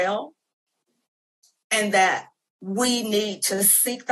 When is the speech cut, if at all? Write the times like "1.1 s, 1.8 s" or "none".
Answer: none

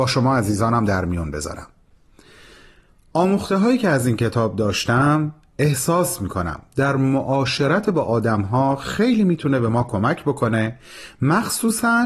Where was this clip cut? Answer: none

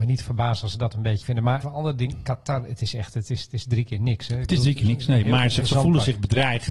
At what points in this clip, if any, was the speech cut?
1.2 s, 1.6 s, 5.6 s

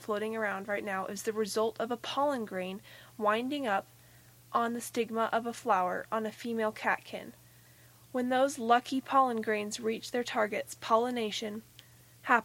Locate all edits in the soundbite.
none

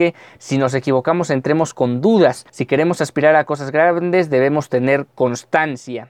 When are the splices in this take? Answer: 2.5 s

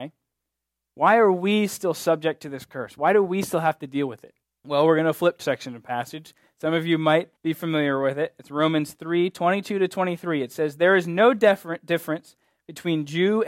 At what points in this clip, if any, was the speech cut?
4.4 s, 5.4 s, 7.4 s

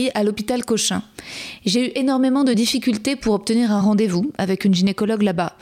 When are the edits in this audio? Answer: none

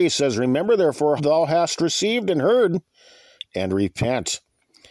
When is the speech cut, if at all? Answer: 1.2 s, 3.4 s

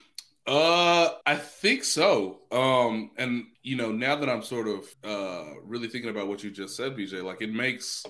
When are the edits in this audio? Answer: 1.2 s, 3.5 s, 4.9 s

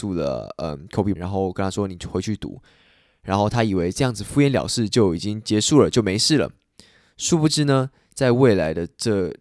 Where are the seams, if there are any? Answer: 1.2 s

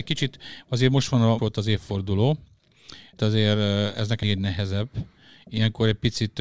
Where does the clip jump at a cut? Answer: 1.4 s, 3.2 s, 4.2 s

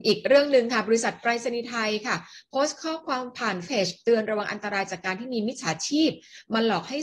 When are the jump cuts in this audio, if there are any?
3.7 s

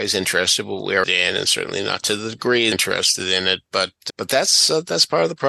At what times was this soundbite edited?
1.0 s, 2.7 s, 4.1 s

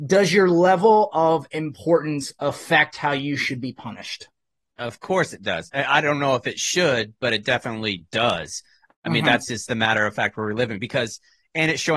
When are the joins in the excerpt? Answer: none

